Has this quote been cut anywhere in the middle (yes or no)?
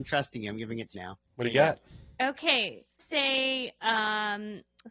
yes